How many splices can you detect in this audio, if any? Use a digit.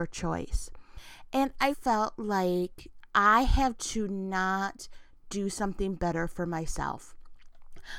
2